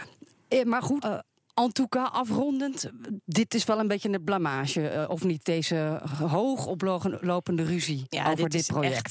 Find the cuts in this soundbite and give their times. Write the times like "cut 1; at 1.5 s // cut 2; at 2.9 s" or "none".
cut 1; at 1.0 s